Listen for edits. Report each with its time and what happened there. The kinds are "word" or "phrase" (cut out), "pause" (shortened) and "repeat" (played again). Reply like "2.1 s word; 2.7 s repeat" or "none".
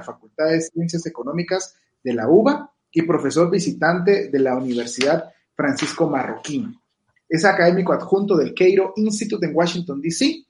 none